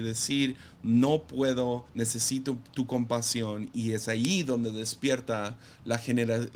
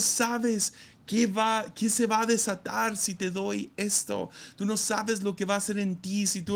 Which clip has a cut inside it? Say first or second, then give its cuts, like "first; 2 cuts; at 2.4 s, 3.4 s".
first; 1 cut; at 1.9 s